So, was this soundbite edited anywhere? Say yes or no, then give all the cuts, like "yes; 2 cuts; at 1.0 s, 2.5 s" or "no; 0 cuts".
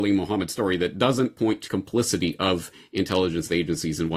yes; 1 cut; at 1.7 s